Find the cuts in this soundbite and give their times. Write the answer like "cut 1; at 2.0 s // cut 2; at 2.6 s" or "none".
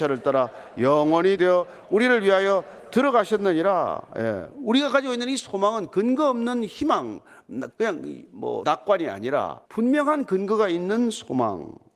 cut 1; at 1.4 s // cut 2; at 7.7 s // cut 3; at 8.6 s // cut 4; at 9.7 s